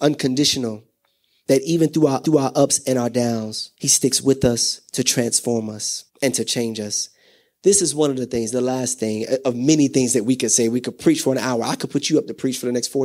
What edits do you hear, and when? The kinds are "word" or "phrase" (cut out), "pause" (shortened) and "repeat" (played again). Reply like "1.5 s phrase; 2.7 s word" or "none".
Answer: 2.2 s repeat; 3.7 s pause; 6.1 s pause